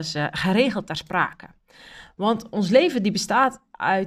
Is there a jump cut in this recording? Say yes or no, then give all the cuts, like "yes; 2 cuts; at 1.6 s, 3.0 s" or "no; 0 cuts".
no; 0 cuts